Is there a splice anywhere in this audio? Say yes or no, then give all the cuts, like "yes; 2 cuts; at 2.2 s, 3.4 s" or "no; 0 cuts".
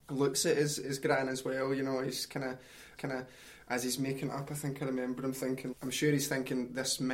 yes; 2 cuts; at 3.0 s, 5.7 s